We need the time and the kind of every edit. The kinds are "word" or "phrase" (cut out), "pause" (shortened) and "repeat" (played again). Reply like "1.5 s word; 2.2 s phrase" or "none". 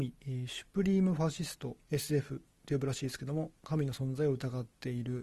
1.8 s pause